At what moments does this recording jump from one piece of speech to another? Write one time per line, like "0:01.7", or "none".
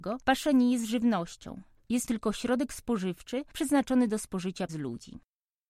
0:02.1
0:04.7